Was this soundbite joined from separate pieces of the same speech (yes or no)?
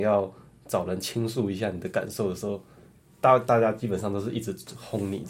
no